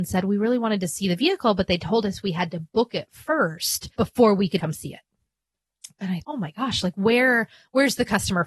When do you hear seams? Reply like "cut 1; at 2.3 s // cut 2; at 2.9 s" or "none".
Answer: cut 1; at 3.9 s // cut 2; at 4.6 s // cut 3; at 6.2 s